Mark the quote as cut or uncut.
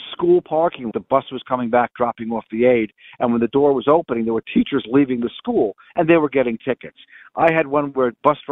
cut